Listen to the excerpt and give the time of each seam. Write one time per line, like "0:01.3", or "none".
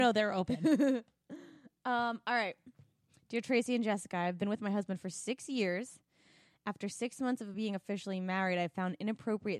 none